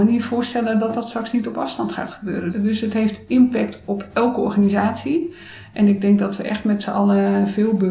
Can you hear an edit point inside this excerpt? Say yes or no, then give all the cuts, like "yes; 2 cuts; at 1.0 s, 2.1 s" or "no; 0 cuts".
no; 0 cuts